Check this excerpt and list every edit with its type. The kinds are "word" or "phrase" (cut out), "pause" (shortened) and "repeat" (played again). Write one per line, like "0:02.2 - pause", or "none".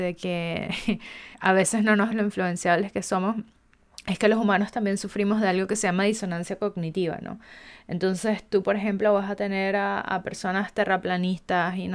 0:01.3 - pause
0:02.1 - phrase